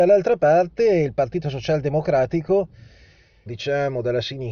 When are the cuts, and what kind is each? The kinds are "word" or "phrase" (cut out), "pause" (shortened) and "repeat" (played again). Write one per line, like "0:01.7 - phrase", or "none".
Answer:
0:03.5 - phrase